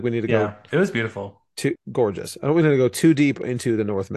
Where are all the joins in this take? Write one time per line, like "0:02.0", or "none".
0:01.8